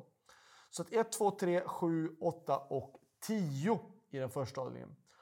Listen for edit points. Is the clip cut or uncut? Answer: uncut